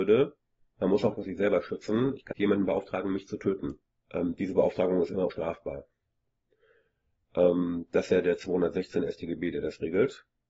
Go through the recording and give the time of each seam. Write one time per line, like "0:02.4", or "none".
0:01.2
0:02.3
0:03.9
0:05.3